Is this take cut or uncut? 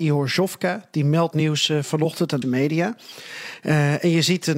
cut